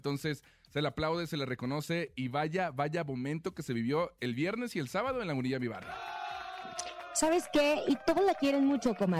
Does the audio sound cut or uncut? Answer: uncut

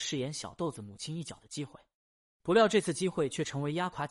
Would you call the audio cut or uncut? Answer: uncut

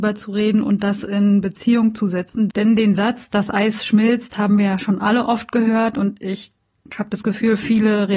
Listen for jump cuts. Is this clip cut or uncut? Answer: uncut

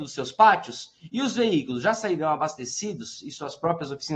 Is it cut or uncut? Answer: uncut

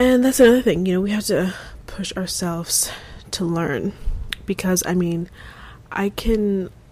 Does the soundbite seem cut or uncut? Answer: uncut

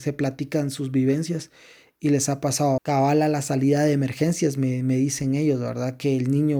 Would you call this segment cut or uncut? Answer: cut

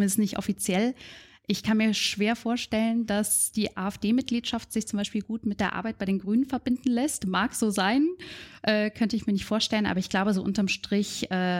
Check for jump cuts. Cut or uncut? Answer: uncut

